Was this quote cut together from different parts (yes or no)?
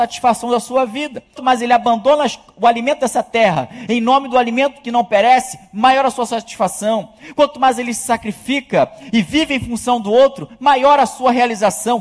yes